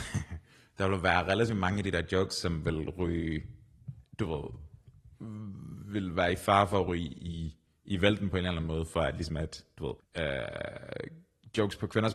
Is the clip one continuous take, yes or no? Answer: no